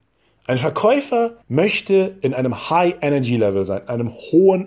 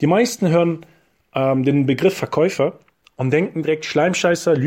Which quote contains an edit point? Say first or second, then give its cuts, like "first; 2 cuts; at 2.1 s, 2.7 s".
first; 1 cut; at 1.4 s